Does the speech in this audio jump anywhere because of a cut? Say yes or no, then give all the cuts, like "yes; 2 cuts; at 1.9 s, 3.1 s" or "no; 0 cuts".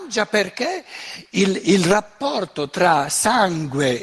no; 0 cuts